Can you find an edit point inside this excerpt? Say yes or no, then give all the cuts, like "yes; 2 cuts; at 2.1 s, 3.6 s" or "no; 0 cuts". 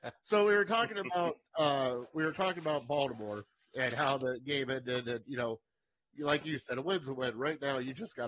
no; 0 cuts